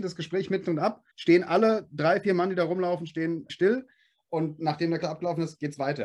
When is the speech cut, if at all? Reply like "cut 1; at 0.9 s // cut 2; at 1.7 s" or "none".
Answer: cut 1; at 1.1 s // cut 2; at 3.5 s // cut 3; at 5.0 s